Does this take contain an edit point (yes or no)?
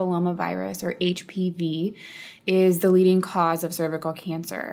no